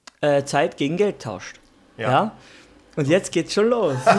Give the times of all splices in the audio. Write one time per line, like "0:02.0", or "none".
none